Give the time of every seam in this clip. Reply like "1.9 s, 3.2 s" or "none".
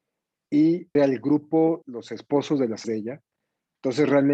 1.0 s, 1.8 s, 2.8 s